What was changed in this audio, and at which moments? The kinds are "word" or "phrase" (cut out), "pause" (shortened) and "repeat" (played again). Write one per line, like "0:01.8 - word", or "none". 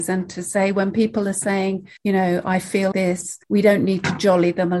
0:02.0 - pause
0:02.9 - word
0:03.4 - pause